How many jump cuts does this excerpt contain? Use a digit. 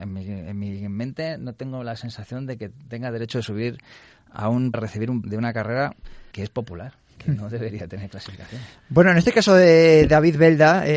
4